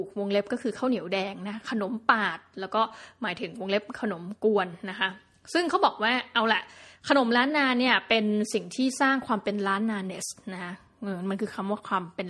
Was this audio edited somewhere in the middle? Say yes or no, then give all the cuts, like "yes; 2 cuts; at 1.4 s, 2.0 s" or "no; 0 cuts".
no; 0 cuts